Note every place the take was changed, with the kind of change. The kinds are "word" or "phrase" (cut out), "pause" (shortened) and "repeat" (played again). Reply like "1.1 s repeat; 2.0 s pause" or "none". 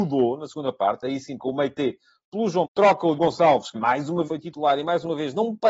1.4 s word; 2.6 s word; 3.2 s word; 3.7 s word; 4.3 s word